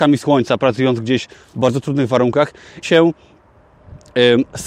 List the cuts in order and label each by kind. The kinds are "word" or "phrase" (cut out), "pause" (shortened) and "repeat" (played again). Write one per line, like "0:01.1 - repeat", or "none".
0:02.8 - phrase